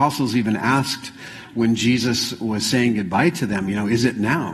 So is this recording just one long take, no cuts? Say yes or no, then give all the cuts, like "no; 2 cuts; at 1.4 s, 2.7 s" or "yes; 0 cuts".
yes; 0 cuts